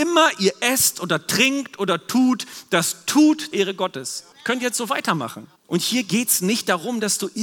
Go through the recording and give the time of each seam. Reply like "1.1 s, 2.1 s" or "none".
3.5 s, 4.3 s, 5.6 s

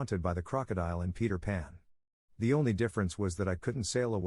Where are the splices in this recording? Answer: none

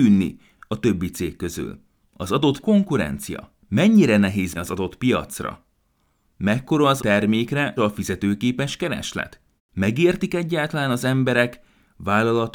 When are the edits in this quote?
2.0 s, 2.6 s, 3.6 s, 4.5 s, 7.0 s, 7.8 s, 9.6 s

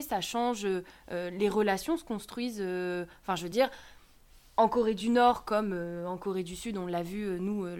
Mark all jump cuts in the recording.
none

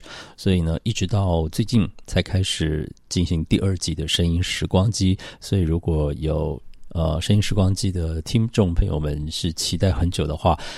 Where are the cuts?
2.0 s

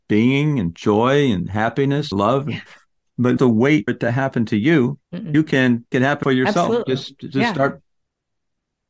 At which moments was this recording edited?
2.1 s, 3.4 s, 3.9 s, 5.0 s, 5.9 s, 6.2 s

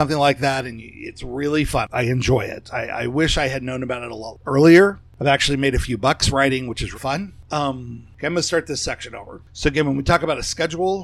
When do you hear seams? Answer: 6.9 s

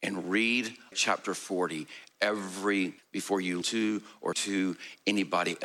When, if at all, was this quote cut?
0.9 s, 3.0 s, 3.6 s, 4.3 s

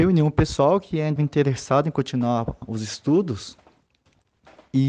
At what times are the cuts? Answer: 1.2 s, 2.6 s

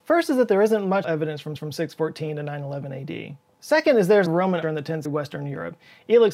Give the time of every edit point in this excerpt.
1.0 s, 1.6 s, 4.3 s, 4.6 s, 5.0 s

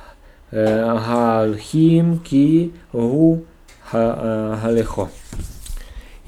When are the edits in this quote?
none

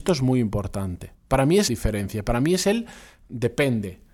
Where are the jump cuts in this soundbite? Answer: 1.2 s, 1.7 s

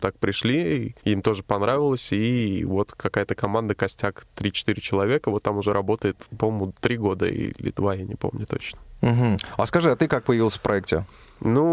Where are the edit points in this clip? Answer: 1.0 s

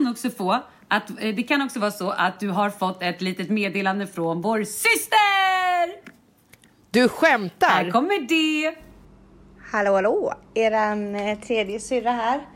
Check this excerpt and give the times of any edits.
none

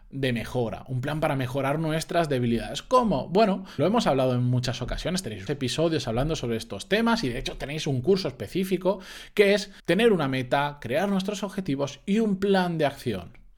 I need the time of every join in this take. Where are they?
3.8 s, 5.5 s, 9.8 s

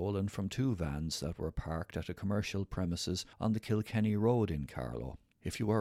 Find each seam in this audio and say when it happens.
3.3 s

